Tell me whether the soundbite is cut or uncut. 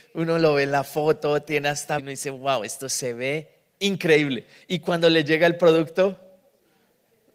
cut